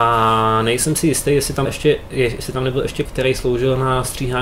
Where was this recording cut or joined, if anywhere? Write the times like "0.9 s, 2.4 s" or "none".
1.7 s, 3.1 s